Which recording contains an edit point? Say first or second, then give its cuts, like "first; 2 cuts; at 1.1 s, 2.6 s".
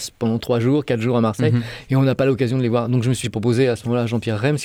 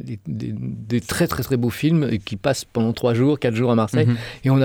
first; 1 cut; at 3.2 s